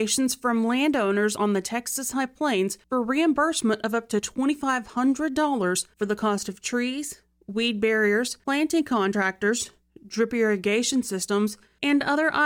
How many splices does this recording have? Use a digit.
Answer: 0